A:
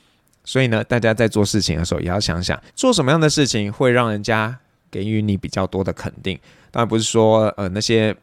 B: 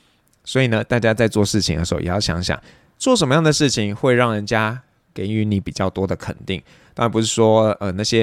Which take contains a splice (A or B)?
A